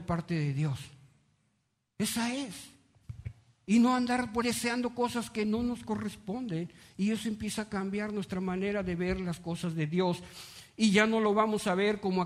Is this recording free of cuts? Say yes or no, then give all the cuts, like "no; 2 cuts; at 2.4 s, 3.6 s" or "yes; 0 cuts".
no; 1 cut; at 4.4 s